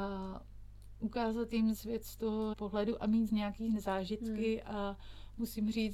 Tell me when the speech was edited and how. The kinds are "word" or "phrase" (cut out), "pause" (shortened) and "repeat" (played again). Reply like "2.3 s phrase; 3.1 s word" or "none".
1.7 s phrase; 2.5 s word; 3.3 s word